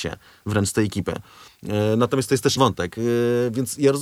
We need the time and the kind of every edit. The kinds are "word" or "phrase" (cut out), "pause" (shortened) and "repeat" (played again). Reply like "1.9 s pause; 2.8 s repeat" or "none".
2.6 s word

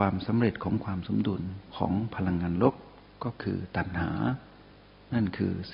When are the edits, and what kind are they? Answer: none

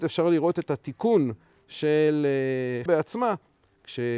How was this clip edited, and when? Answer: 2.9 s word

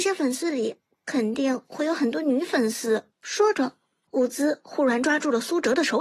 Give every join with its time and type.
3.1 s pause

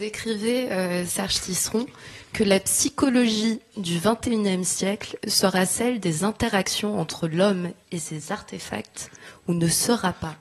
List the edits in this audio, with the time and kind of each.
none

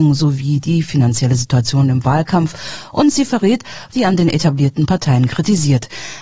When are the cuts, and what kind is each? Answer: 3.9 s word

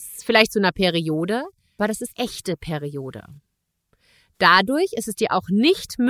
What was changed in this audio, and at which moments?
1.8 s word; 2.1 s word

